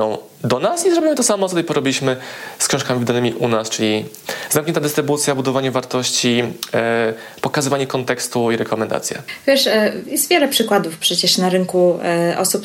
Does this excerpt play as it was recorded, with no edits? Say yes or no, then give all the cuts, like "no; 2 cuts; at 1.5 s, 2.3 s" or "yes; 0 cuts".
yes; 0 cuts